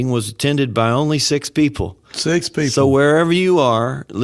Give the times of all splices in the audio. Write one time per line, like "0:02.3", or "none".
none